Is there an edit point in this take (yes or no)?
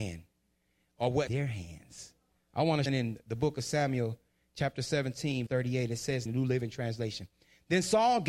yes